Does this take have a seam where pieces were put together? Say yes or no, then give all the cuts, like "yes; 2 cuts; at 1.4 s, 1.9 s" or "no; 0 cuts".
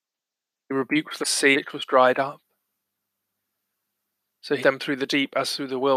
yes; 3 cuts; at 1.2 s, 1.5 s, 4.6 s